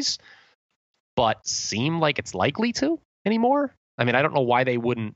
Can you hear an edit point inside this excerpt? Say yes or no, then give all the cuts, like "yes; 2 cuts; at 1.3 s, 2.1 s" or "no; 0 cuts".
yes; 2 cuts; at 1.4 s, 3.8 s